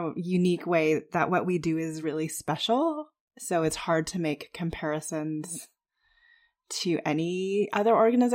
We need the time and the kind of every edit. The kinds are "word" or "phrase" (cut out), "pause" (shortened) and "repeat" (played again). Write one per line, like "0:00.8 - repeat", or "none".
none